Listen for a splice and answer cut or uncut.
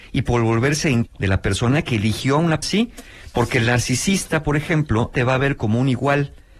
cut